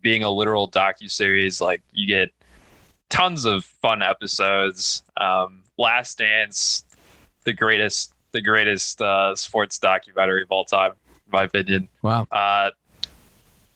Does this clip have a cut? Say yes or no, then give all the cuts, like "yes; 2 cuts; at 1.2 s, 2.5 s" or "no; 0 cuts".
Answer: no; 0 cuts